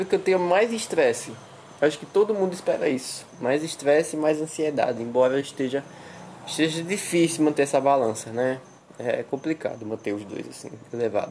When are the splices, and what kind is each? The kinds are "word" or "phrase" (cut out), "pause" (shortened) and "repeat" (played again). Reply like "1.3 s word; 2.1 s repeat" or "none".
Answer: none

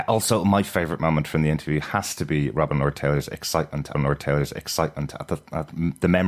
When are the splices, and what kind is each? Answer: 3.9 s repeat

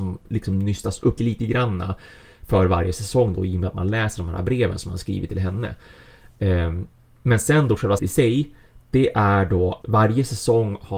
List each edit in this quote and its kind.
1.2 s word; 8.0 s word; 9.8 s word

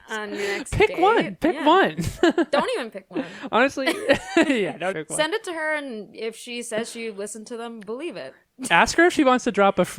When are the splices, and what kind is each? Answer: 4.9 s word

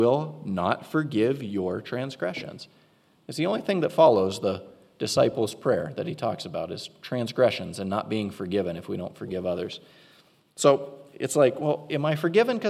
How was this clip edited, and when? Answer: none

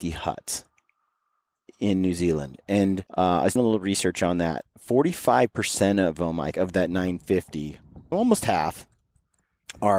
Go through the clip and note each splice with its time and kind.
3.1 s pause; 3.6 s word; 6.5 s word; 8.1 s word

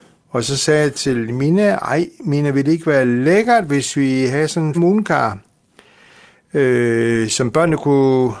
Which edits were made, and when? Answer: 4.7 s word

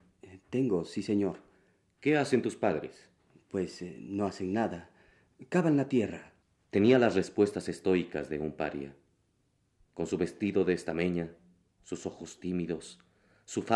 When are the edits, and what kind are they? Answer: 6.4 s pause

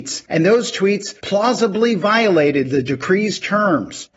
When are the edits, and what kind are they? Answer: 1.2 s pause

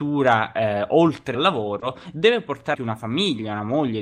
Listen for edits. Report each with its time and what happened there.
1.3 s word; 2.7 s word

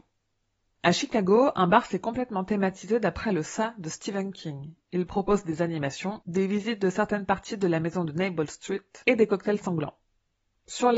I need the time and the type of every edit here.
none

